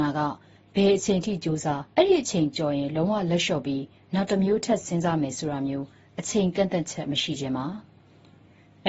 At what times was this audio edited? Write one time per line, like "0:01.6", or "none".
0:01.9